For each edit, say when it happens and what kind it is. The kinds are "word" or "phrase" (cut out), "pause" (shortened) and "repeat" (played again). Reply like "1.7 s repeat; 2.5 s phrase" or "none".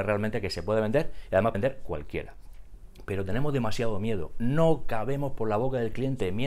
1.5 s word

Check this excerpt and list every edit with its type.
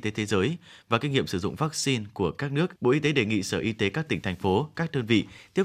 2.8 s pause

